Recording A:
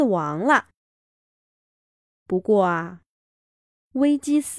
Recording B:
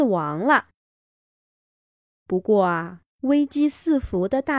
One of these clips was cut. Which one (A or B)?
B